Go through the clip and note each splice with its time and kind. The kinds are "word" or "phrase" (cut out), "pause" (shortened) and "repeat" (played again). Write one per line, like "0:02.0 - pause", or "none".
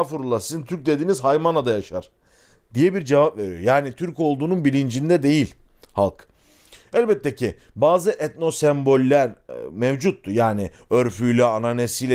none